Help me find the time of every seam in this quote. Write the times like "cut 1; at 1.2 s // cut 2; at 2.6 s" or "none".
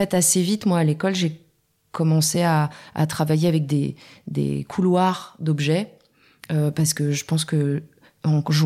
none